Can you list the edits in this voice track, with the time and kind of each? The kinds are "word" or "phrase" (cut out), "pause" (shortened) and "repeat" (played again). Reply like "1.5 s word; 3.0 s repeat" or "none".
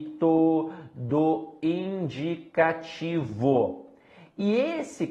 none

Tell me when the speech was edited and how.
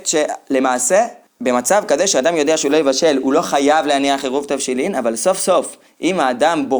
none

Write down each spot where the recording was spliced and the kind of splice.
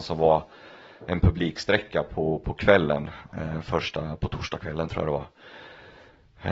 none

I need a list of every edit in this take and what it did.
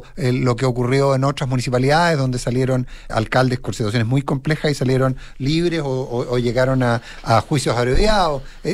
3.1 s word

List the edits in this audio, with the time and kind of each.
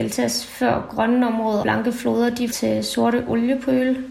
1.6 s word; 2.5 s word

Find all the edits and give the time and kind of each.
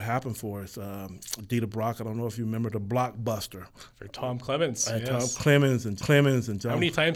6.0 s repeat

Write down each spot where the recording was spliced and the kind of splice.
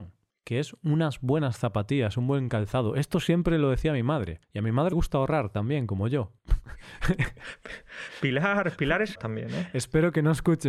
4.4 s pause; 4.9 s word; 6.4 s pause; 9.2 s word

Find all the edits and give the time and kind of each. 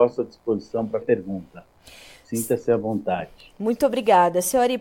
1.0 s word

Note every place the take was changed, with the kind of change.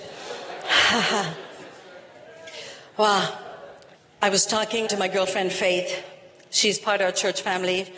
3.9 s pause; 4.9 s word

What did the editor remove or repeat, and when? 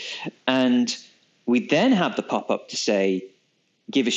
none

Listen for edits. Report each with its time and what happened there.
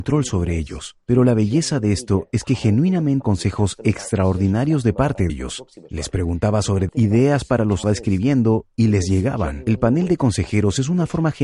3.2 s word; 5.3 s word; 6.9 s word; 7.8 s phrase

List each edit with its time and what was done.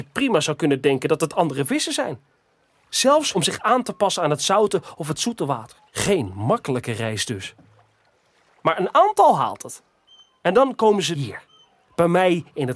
3.3 s phrase; 5.9 s pause

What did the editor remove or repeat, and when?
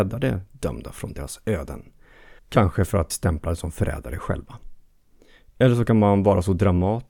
2.4 s pause; 3.1 s phrase

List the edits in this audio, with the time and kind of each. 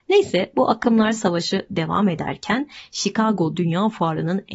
none

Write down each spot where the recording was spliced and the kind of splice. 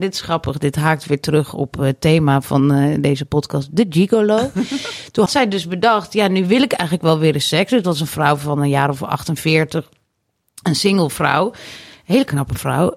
5.3 s word

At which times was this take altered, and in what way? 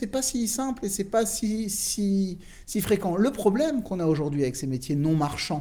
none

